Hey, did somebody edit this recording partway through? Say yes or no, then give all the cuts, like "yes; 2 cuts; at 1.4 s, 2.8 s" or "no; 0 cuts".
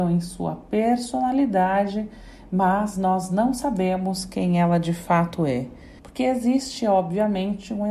yes; 1 cut; at 6.0 s